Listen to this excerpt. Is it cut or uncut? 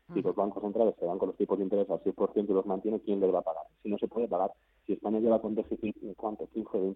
uncut